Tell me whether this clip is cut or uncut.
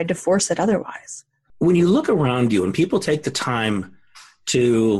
uncut